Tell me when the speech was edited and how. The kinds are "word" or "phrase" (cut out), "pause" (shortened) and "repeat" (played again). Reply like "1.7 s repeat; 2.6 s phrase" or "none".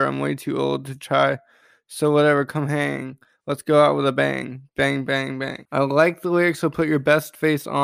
none